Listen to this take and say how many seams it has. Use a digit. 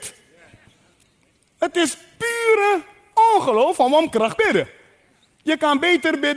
1